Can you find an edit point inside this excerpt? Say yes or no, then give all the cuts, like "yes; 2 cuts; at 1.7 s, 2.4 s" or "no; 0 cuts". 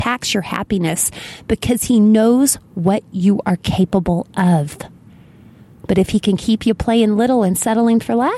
no; 0 cuts